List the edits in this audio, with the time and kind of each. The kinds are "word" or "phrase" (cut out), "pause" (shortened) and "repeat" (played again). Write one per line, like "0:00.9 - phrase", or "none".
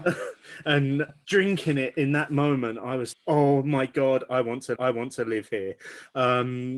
0:01.2 - word
0:03.1 - word
0:04.8 - repeat